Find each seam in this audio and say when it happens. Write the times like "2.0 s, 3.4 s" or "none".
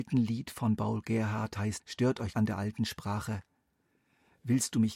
1.8 s, 2.3 s